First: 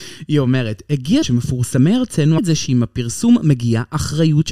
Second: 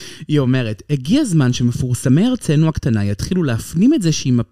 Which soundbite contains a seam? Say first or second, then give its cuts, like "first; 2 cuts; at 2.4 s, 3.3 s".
first; 2 cuts; at 1.2 s, 2.4 s